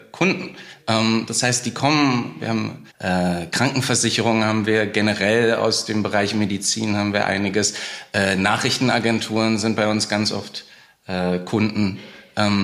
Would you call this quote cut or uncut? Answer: cut